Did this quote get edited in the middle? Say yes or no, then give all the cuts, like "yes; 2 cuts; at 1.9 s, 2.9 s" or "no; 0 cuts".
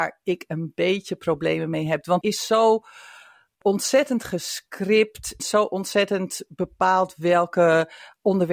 yes; 3 cuts; at 2.2 s, 3.6 s, 5.4 s